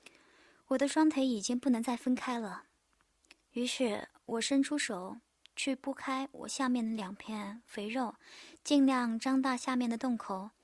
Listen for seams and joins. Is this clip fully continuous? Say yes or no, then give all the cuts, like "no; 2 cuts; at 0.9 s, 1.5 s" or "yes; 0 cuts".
yes; 0 cuts